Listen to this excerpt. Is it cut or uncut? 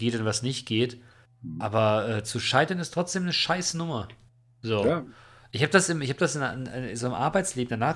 uncut